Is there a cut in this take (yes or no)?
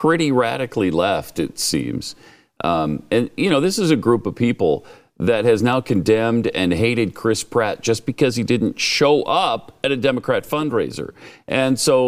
no